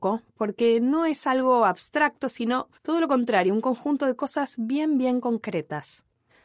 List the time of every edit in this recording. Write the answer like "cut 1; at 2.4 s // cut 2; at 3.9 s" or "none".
cut 1; at 2.8 s

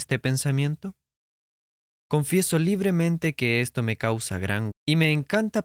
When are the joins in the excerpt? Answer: cut 1; at 4.7 s

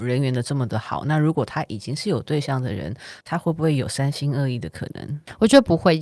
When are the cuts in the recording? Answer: cut 1; at 3.2 s

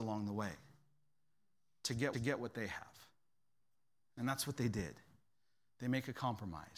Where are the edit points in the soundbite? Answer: cut 1; at 2.1 s // cut 2; at 3.6 s

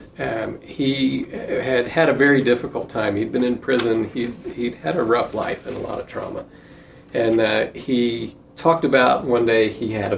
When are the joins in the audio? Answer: none

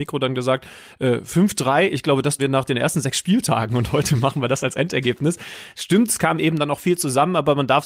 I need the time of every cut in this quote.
cut 1; at 2.4 s

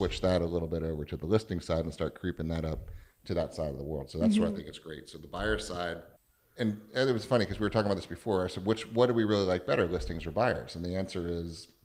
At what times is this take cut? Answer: cut 1; at 6.2 s

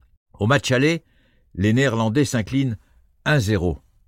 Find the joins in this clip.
none

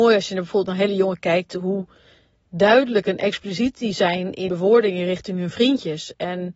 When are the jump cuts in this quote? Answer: cut 1; at 1.2 s // cut 2; at 4.5 s

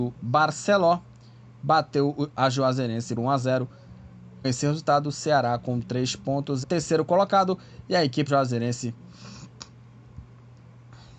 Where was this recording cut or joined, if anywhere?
cut 1; at 3.2 s // cut 2; at 4.4 s // cut 3; at 6.6 s // cut 4; at 8.3 s

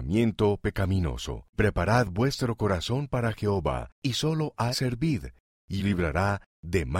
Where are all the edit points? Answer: cut 1; at 1.5 s // cut 2; at 3.9 s // cut 3; at 4.7 s // cut 4; at 5.8 s

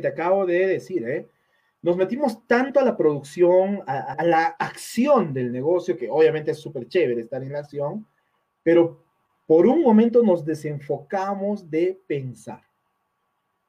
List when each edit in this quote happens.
cut 1; at 4.1 s

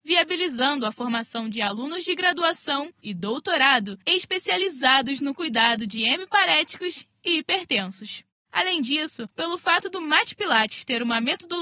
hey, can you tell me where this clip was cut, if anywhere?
cut 1; at 3.0 s // cut 2; at 4.0 s // cut 3; at 9.3 s

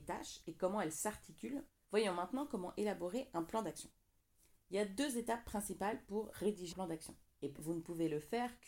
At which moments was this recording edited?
cut 1; at 6.7 s // cut 2; at 7.6 s

